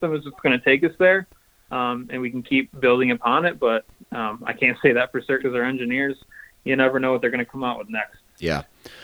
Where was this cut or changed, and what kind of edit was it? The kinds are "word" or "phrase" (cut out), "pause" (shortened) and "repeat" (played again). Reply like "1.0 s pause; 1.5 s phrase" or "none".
5.4 s word